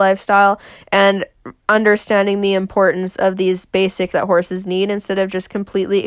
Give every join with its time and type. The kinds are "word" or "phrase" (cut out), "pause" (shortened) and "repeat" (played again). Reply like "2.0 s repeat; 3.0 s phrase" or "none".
4.1 s word